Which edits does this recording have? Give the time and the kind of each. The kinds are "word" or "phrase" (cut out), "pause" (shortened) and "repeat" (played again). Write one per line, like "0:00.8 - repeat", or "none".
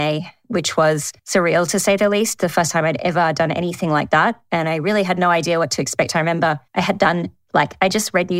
0:01.2 - pause
0:06.7 - pause